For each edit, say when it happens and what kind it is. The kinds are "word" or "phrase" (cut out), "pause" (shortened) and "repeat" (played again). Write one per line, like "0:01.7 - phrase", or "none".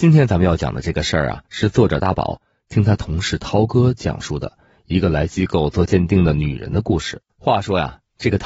0:01.5 - pause
0:07.3 - pause